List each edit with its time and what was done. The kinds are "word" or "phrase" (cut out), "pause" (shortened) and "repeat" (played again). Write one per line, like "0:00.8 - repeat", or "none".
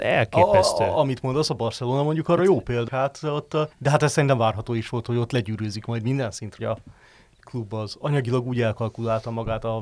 0:02.9 - word
0:03.7 - pause
0:06.6 - phrase